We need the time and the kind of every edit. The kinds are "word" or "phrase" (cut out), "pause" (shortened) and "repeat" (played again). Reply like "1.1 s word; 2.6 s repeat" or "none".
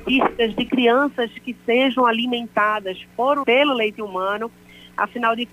3.4 s word